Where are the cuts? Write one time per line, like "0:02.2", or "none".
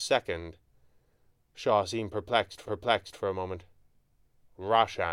0:02.7